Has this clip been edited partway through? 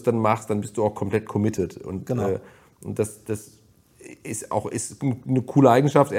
no; 0 cuts

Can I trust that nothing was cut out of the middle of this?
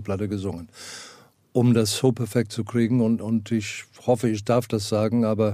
yes; 0 cuts

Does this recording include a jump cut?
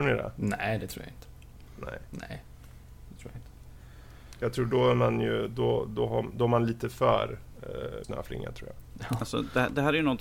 yes; 1 cut; at 8.0 s

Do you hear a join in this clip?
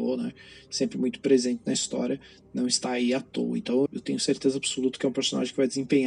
yes; 1 cut; at 3.9 s

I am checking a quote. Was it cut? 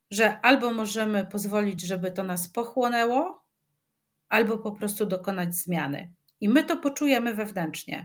no; 0 cuts

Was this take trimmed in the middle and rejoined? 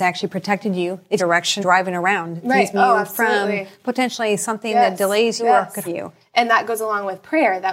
yes; 5 cuts; at 1.2 s, 1.6 s, 2.7 s, 5.4 s, 5.8 s

